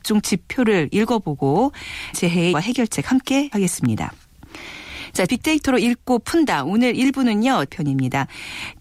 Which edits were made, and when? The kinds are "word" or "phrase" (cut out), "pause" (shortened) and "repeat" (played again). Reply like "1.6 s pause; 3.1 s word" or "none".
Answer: 2.1 s word; 2.5 s word; 3.5 s word; 5.3 s word; 7.7 s word